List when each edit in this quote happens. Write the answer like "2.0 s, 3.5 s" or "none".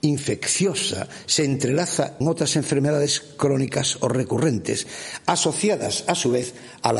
2.2 s